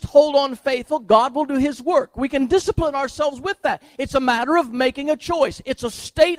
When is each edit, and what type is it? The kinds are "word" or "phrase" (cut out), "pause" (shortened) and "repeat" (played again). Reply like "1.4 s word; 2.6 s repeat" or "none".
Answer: none